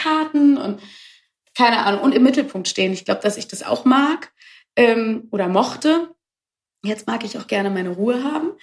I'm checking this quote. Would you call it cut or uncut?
uncut